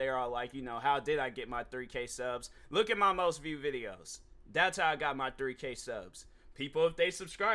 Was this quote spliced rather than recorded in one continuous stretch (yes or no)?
no